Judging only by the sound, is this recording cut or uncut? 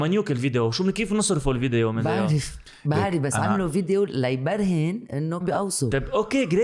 cut